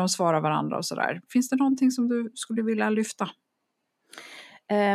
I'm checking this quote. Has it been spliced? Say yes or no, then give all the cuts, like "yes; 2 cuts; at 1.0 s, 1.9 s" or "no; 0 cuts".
no; 0 cuts